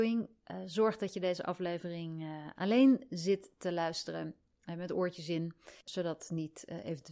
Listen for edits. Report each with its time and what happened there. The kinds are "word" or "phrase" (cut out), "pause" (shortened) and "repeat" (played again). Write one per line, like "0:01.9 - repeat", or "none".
0:05.8 - pause